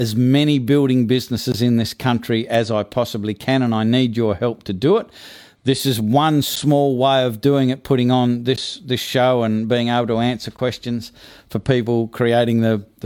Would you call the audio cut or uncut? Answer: uncut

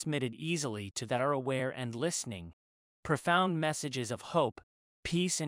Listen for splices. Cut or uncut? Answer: cut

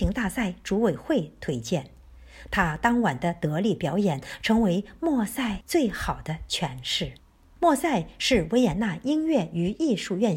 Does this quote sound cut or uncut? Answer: uncut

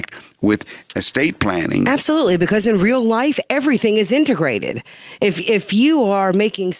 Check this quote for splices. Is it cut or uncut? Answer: uncut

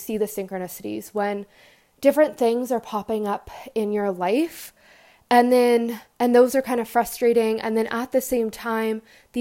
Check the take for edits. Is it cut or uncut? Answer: uncut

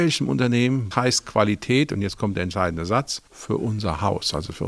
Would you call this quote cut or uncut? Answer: cut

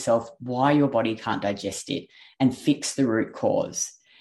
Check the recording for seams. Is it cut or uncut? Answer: uncut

